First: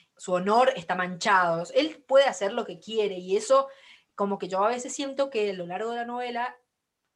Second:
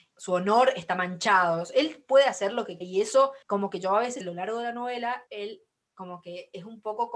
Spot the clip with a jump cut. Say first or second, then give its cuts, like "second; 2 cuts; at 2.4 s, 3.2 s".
second; 4 cuts; at 2.8 s, 3.4 s, 4.2 s, 5.3 s